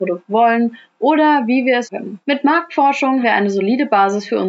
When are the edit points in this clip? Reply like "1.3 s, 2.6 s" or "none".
1.9 s, 2.2 s, 3.2 s